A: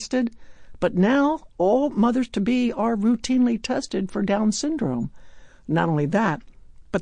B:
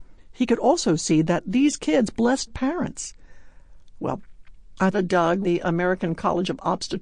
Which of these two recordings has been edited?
B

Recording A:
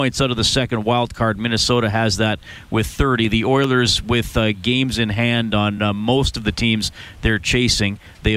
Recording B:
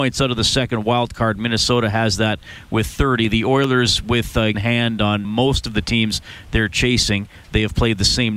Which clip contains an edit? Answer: B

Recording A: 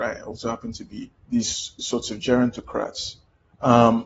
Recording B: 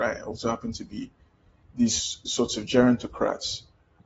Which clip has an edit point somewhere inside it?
A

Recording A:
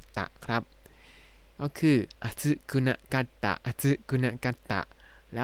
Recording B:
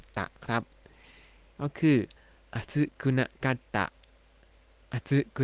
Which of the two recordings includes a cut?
A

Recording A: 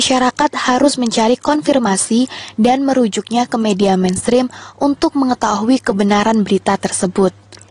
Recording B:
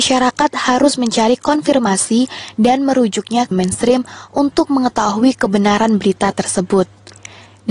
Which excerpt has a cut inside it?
B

